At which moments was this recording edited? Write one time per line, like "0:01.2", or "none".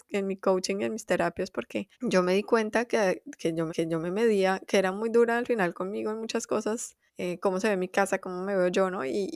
0:01.9
0:03.7
0:07.1